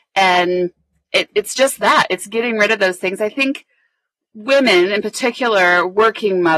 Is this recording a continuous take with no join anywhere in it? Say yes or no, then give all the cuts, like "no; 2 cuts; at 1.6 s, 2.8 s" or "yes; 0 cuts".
yes; 0 cuts